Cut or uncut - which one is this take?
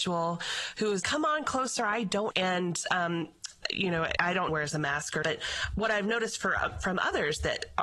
cut